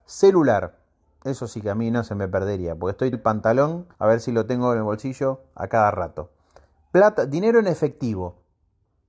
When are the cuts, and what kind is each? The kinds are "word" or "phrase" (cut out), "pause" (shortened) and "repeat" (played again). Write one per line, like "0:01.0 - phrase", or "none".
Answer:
0:03.1 - word
0:03.9 - pause